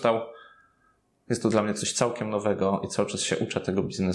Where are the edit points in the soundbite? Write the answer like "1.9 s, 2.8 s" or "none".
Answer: none

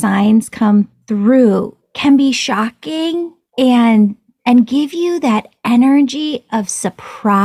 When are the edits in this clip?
none

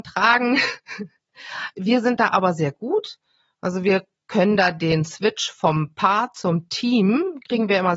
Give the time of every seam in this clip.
none

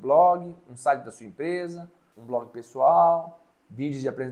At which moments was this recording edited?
none

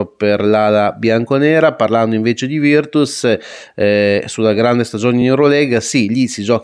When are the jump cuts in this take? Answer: none

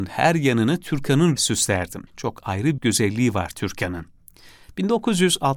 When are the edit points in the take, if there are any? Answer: 1.4 s, 2.1 s, 2.8 s

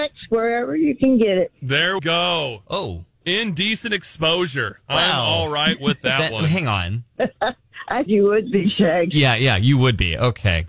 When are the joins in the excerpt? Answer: 2.0 s, 8.1 s

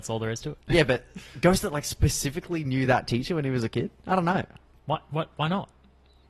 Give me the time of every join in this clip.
none

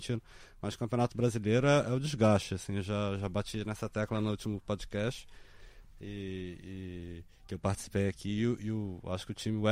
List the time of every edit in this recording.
7.3 s

